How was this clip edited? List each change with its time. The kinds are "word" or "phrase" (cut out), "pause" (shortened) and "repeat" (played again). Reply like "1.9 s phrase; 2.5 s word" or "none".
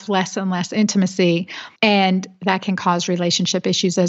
1.8 s pause